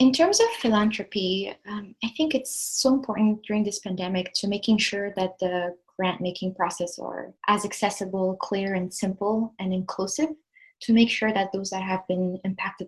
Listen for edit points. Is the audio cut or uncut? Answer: cut